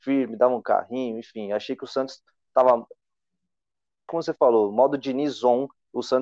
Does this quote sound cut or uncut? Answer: uncut